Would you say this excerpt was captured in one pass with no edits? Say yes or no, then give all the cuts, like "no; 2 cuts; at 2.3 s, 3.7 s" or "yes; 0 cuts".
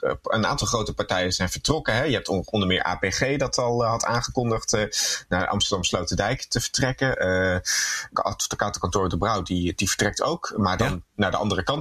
yes; 0 cuts